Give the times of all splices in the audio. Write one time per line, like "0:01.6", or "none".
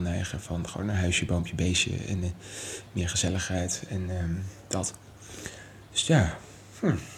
none